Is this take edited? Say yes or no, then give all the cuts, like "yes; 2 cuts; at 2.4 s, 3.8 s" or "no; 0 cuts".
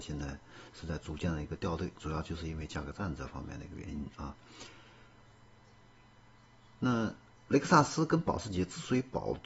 no; 0 cuts